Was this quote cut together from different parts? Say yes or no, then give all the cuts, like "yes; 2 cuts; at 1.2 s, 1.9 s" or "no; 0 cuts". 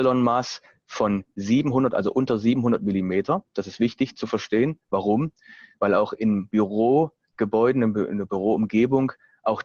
no; 0 cuts